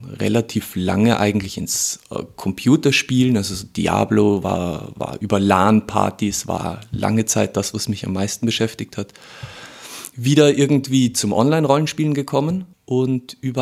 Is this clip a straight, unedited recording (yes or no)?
no